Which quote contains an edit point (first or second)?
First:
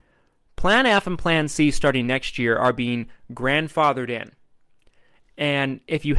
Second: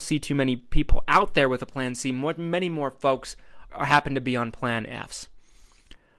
second